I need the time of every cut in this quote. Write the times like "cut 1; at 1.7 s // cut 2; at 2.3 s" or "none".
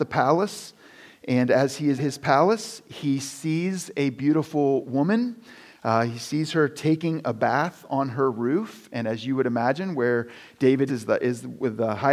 cut 1; at 2.0 s // cut 2; at 10.9 s

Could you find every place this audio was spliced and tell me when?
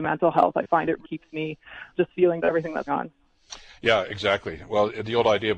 cut 1; at 1.0 s // cut 2; at 1.9 s // cut 3; at 2.4 s // cut 4; at 2.9 s

